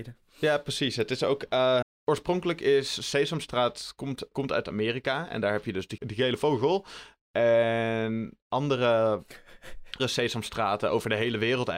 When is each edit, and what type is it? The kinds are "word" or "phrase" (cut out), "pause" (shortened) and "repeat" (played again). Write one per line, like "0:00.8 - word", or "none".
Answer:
0:01.8 - word
0:04.3 - word
0:06.0 - word
0:10.0 - word

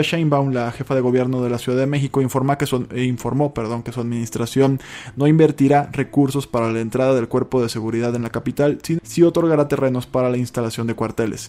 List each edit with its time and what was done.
0:09.0 - word

